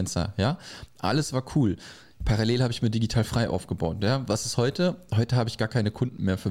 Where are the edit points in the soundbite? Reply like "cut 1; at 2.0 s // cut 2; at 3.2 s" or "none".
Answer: none